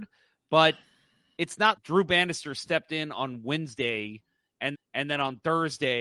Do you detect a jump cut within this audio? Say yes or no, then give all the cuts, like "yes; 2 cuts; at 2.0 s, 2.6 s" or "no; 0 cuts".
yes; 2 cuts; at 1.8 s, 4.7 s